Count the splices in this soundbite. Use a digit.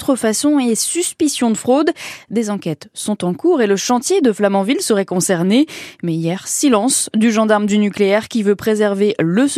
0